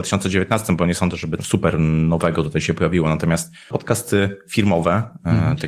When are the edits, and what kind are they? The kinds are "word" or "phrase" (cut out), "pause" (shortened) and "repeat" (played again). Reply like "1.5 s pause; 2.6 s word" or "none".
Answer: 1.4 s word; 3.7 s phrase